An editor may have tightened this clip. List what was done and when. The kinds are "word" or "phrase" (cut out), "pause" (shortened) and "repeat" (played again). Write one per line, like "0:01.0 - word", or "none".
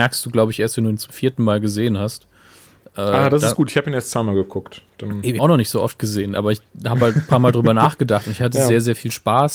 0:05.4 - word